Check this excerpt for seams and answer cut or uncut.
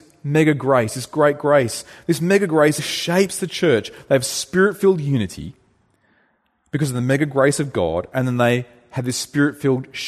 cut